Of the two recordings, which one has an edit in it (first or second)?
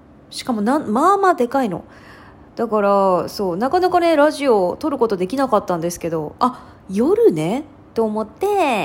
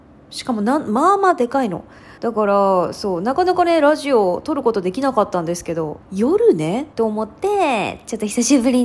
second